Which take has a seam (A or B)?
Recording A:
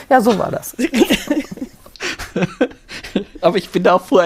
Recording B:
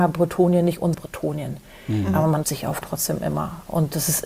B